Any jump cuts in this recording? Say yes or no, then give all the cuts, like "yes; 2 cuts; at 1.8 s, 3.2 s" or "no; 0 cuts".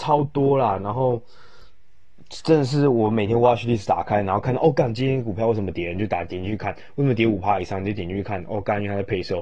no; 0 cuts